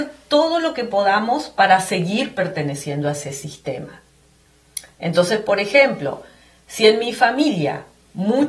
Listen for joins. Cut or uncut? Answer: uncut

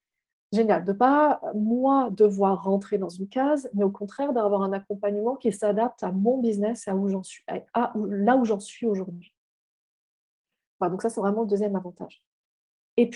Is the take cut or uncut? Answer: uncut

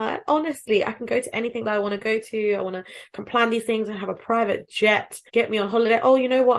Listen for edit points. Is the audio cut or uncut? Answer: cut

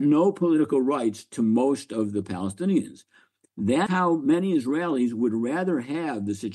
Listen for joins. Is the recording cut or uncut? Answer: cut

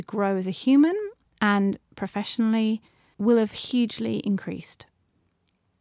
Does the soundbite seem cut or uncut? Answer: uncut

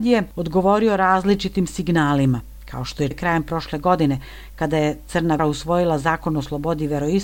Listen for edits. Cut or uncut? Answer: cut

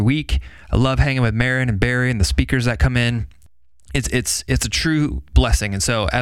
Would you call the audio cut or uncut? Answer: uncut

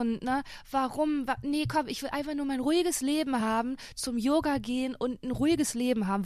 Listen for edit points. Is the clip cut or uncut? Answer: uncut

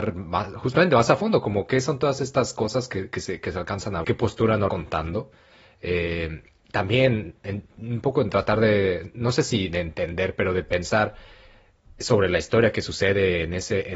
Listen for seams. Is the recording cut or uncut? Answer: cut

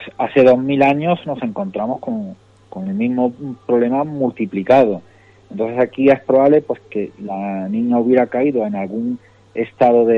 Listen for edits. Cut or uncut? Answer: uncut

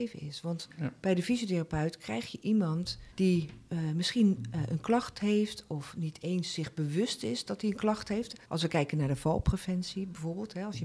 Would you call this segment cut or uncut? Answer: cut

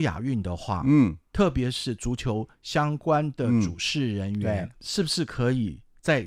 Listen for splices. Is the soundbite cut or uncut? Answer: cut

